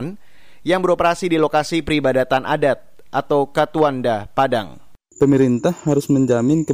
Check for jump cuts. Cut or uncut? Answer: uncut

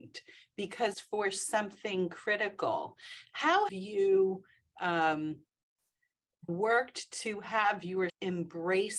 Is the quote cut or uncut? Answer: cut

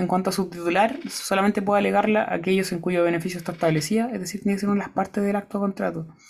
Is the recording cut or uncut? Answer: uncut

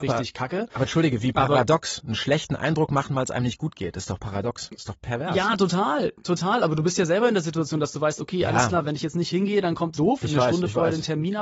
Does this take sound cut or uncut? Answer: cut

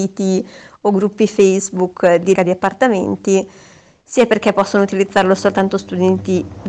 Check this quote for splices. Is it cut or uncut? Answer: cut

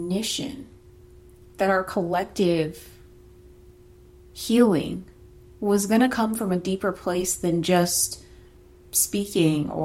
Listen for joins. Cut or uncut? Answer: uncut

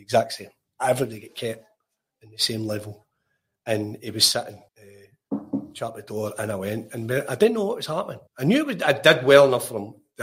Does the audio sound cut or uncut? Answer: cut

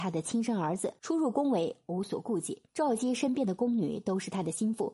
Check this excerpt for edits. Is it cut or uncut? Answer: cut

